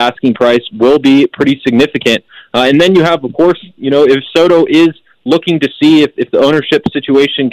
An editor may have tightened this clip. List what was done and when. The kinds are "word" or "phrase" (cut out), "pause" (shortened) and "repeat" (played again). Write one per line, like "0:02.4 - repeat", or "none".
none